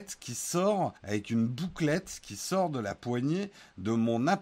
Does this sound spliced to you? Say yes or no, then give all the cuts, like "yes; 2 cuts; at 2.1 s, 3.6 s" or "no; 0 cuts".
yes; 1 cut; at 1.0 s